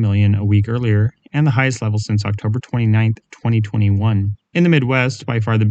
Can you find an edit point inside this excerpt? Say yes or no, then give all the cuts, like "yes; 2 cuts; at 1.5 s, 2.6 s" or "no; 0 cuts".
yes; 1 cut; at 4.5 s